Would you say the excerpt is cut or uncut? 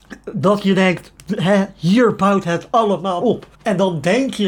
cut